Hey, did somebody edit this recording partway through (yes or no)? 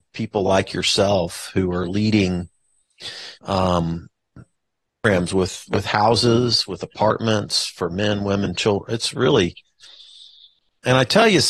yes